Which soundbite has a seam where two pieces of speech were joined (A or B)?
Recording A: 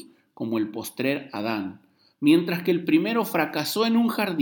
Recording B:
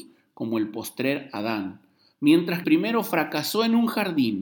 B